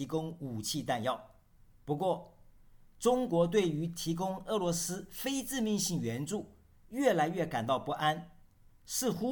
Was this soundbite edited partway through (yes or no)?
no